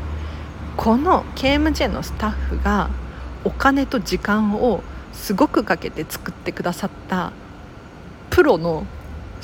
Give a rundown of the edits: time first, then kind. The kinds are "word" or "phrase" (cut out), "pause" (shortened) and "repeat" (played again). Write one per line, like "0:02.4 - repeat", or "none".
none